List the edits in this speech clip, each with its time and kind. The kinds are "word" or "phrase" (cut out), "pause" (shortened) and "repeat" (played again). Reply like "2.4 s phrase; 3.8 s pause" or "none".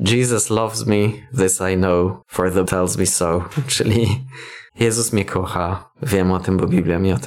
2.2 s pause; 2.7 s word; 4.7 s pause

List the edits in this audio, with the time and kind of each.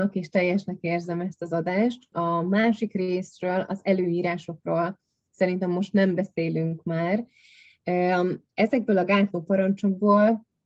2.1 s word

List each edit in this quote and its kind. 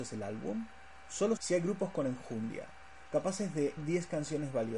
1.4 s word; 3.8 s word

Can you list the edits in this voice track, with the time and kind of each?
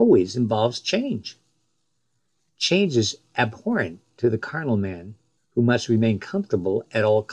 5.4 s pause

